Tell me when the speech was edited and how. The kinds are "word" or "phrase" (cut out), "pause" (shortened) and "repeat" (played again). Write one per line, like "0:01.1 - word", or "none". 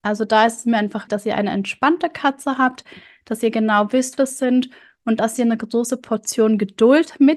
0:01.1 - word
0:04.2 - phrase